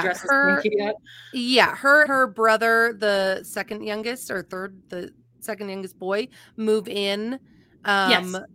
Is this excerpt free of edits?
no; 1 cut; at 2.1 s

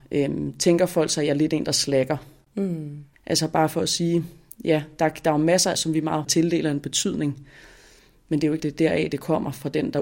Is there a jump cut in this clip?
yes; 4 cuts; at 4.5 s, 5.7 s, 6.2 s, 8.6 s

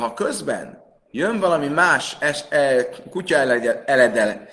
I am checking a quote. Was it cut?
no; 0 cuts

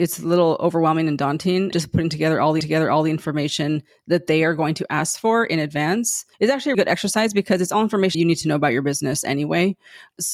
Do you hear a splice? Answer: yes; 5 cuts; at 1.7 s, 2.6 s, 6.3 s, 6.7 s, 8.1 s

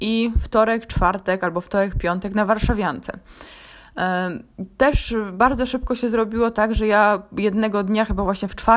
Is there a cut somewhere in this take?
no; 0 cuts

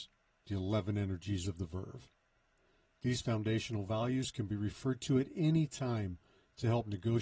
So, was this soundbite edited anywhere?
no; 0 cuts

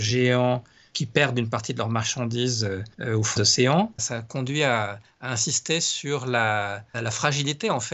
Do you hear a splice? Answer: yes; 3 cuts; at 2.9 s, 3.4 s, 6.9 s

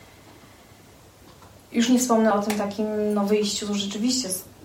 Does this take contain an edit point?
no; 0 cuts

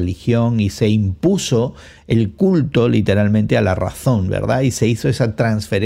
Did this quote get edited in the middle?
no; 0 cuts

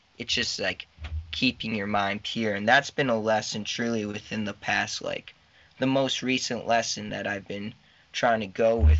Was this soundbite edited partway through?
no; 0 cuts

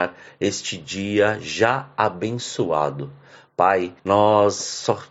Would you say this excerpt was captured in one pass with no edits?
no; 1 cut; at 4.0 s

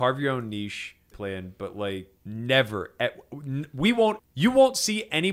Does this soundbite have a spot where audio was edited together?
yes; 3 cuts; at 1.1 s, 2.2 s, 4.2 s

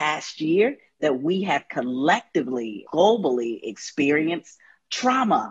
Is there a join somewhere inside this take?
yes; 1 cut; at 2.8 s

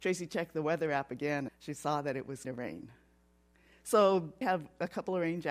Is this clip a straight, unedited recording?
no; 3 cuts; at 1.5 s, 2.4 s, 4.4 s

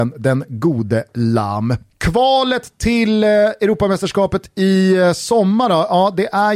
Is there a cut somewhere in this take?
no; 0 cuts

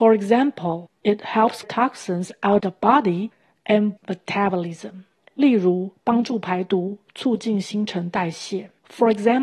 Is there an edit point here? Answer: yes; 3 cuts; at 1.6 s, 2.6 s, 4.0 s

